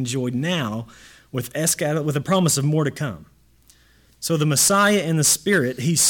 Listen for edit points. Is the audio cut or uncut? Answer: uncut